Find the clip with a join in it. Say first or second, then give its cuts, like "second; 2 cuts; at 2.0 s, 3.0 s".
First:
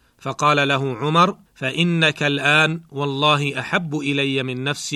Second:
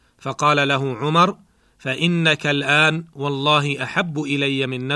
first; 1 cut; at 1.5 s